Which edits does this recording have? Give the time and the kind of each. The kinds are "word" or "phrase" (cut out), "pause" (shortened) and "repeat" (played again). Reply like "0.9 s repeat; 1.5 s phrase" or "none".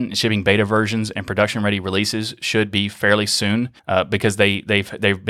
3.8 s pause